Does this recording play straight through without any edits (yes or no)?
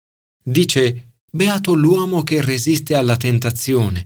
no